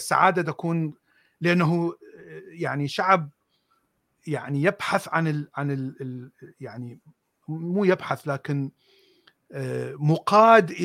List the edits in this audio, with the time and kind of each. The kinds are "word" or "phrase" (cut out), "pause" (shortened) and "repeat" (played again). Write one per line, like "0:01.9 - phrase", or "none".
none